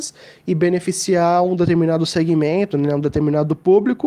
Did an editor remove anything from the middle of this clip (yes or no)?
no